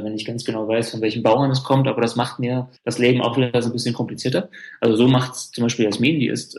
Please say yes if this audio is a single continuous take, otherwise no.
no